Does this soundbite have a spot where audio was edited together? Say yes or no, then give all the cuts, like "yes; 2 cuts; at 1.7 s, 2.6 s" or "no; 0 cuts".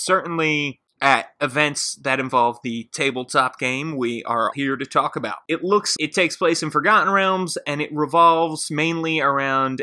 yes; 2 cuts; at 4.5 s, 6.0 s